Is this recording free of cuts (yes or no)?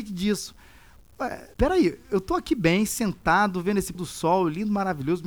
no